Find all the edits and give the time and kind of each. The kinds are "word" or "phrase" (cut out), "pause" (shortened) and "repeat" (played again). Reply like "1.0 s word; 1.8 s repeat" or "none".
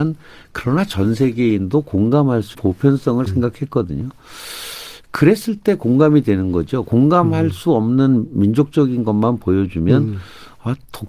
2.5 s word; 3.3 s phrase